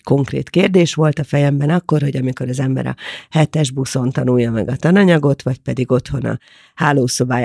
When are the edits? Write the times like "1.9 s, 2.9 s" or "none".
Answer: none